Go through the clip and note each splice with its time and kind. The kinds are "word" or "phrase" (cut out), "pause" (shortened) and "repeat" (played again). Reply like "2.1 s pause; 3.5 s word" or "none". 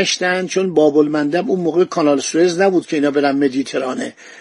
none